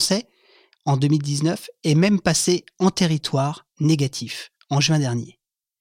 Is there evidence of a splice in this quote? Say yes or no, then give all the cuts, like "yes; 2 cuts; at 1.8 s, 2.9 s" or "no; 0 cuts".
no; 0 cuts